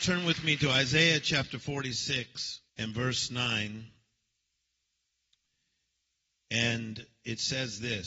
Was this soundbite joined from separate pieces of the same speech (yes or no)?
yes